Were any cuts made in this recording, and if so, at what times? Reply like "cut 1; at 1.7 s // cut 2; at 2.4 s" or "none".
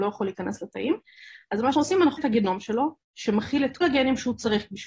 cut 1; at 1.7 s // cut 2; at 2.2 s // cut 3; at 3.0 s // cut 4; at 3.8 s